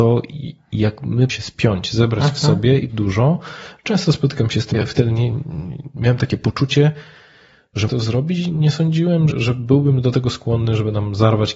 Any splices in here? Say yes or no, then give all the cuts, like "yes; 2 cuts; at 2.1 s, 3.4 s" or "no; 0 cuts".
yes; 6 cuts; at 1.3 s, 2.9 s, 4.7 s, 5.3 s, 7.9 s, 9.3 s